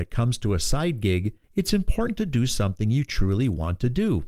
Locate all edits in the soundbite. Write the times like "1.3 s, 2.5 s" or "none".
1.4 s